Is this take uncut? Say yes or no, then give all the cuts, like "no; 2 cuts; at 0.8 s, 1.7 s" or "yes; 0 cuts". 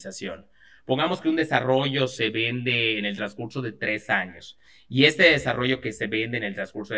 yes; 0 cuts